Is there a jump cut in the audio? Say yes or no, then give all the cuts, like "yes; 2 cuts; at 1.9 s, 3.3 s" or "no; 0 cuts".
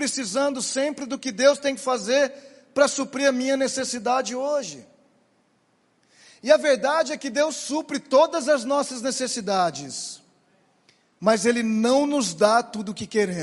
no; 0 cuts